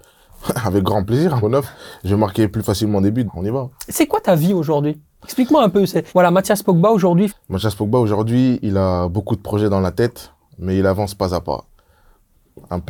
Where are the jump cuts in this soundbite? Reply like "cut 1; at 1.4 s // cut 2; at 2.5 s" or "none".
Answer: cut 1; at 1.4 s // cut 2; at 3.3 s // cut 3; at 6.1 s // cut 4; at 7.3 s